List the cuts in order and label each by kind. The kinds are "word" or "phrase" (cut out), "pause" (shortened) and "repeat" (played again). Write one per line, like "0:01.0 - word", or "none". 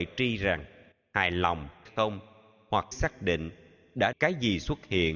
0:00.9 - pause
0:01.9 - word
0:02.9 - word
0:04.1 - phrase